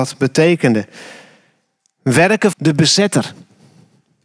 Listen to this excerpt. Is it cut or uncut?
cut